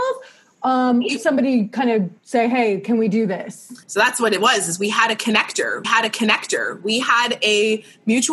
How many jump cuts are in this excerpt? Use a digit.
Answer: 4